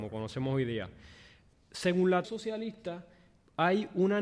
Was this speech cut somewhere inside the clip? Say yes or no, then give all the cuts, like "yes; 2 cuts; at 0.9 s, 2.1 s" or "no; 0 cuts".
yes; 2 cuts; at 1.5 s, 2.2 s